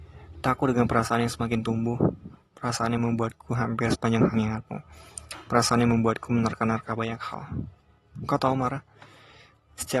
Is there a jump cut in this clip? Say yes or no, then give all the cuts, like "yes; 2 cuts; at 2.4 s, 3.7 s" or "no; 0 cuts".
yes; 1 cut; at 4.3 s